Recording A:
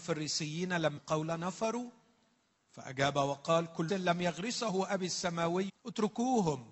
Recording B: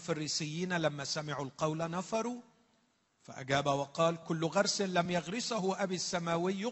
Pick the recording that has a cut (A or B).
A